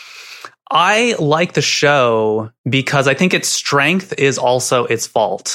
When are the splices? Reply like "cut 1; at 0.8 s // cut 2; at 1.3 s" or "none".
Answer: cut 1; at 2.6 s